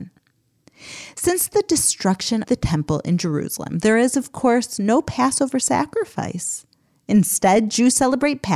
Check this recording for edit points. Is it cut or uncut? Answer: cut